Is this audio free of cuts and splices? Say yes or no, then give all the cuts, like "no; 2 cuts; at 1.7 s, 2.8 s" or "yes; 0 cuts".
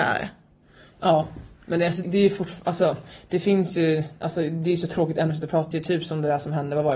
no; 2 cuts; at 2.0 s, 5.7 s